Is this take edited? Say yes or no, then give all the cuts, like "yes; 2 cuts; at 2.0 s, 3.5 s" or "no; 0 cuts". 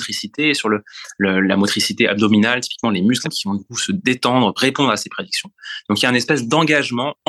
yes; 2 cuts; at 3.2 s, 4.6 s